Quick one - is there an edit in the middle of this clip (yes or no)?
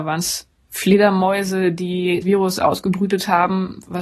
yes